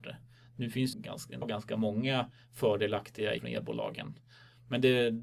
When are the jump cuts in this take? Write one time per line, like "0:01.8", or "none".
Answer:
0:00.9
0:01.4
0:03.4

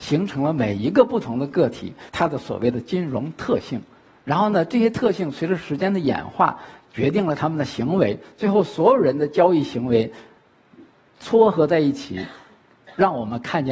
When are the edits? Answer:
0:02.1

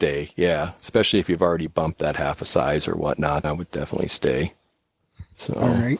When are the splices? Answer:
0:02.0
0:03.4

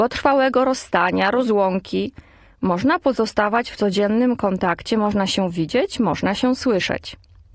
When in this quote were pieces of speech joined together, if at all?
none

